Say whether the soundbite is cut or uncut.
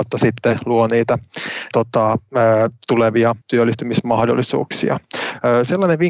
cut